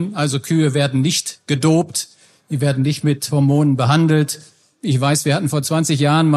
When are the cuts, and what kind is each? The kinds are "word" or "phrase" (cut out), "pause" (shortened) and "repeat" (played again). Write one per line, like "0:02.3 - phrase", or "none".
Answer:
none